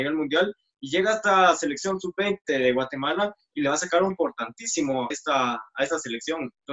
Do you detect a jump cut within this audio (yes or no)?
yes